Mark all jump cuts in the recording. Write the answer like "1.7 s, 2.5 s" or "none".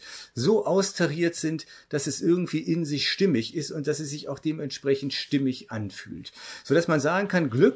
none